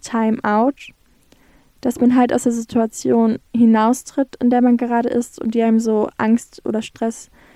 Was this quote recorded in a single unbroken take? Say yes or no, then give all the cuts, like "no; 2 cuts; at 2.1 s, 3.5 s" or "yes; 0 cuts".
no; 1 cut; at 3.5 s